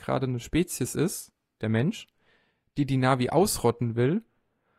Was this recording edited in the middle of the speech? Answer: no; 0 cuts

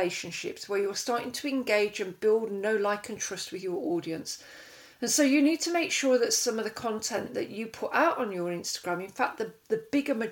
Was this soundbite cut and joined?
no; 0 cuts

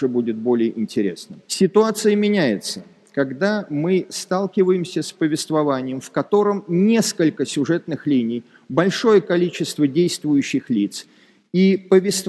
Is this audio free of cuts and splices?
no; 1 cut; at 1.4 s

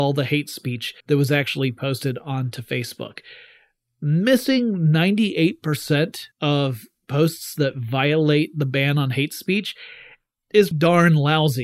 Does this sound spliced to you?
yes; 3 cuts; at 1.0 s, 6.3 s, 10.7 s

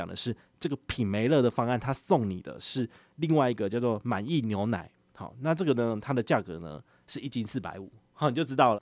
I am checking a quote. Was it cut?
no; 0 cuts

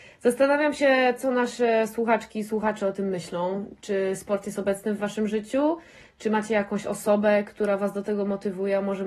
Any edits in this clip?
no; 0 cuts

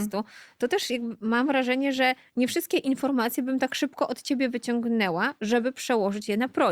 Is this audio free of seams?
yes; 0 cuts

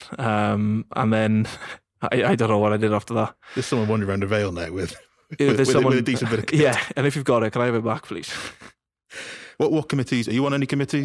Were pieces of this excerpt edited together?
no; 0 cuts

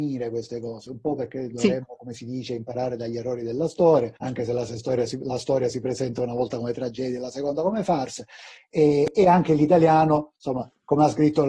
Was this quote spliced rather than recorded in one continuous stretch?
yes; 1 cut; at 4.2 s

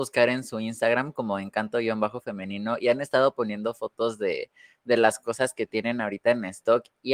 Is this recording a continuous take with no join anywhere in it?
yes; 0 cuts

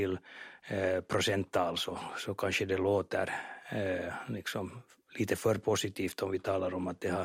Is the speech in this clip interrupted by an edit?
no; 0 cuts

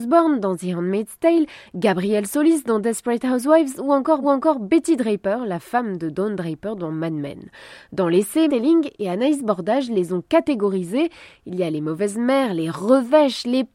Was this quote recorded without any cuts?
no; 2 cuts; at 4.2 s, 8.5 s

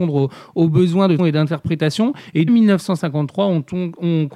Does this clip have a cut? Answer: yes; 2 cuts; at 1.2 s, 2.5 s

